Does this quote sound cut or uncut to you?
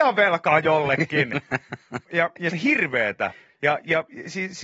cut